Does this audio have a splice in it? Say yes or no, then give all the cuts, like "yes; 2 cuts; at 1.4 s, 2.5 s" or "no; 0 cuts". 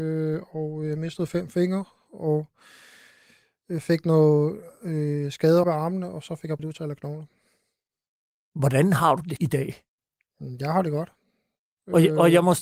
yes; 3 cuts; at 5.6 s, 6.6 s, 9.4 s